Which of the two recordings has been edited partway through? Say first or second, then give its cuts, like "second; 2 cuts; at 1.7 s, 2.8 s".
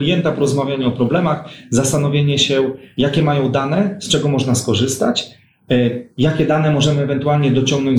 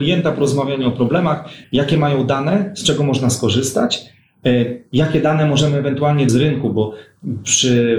second; 2 cuts; at 1.6 s, 6.3 s